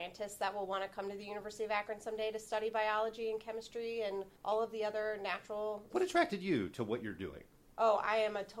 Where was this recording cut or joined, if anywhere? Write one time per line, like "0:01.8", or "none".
0:04.4
0:05.9
0:06.7